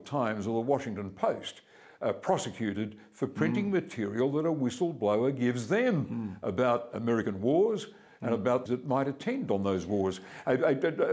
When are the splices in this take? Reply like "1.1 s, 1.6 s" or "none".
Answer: 8.7 s

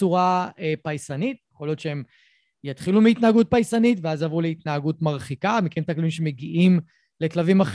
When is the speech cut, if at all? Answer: none

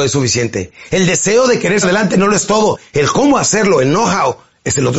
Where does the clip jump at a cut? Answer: 1.8 s

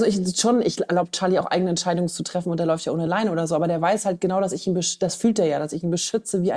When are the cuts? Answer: none

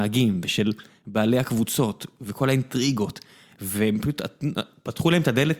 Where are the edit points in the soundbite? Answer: none

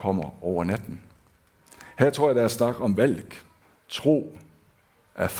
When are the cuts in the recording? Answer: 3.6 s

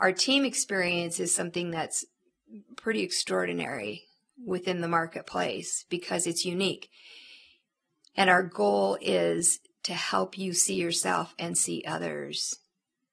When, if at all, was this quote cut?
none

